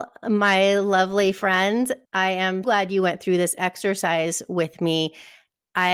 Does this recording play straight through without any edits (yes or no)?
no